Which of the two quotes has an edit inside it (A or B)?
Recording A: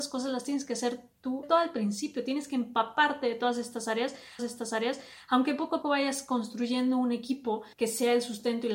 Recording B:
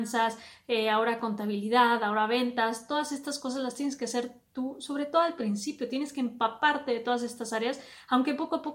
A